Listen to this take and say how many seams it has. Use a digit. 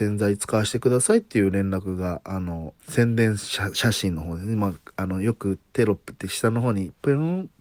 1